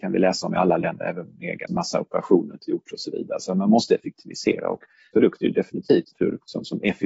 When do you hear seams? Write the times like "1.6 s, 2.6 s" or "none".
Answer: 1.7 s, 2.5 s, 5.1 s, 6.1 s